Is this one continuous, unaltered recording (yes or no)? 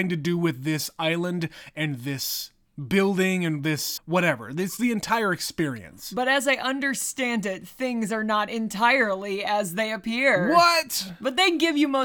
no